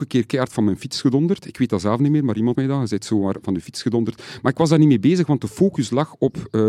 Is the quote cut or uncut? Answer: cut